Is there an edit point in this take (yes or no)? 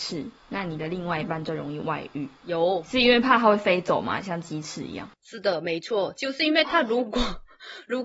yes